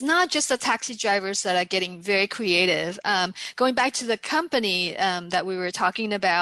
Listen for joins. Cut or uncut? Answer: uncut